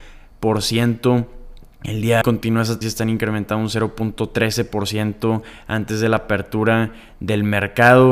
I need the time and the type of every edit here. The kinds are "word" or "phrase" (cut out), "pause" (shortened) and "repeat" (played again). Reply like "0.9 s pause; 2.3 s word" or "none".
2.2 s phrase; 2.8 s word